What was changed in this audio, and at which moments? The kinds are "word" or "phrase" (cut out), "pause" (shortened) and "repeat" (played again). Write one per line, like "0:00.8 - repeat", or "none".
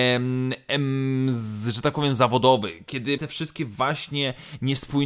0:03.2 - word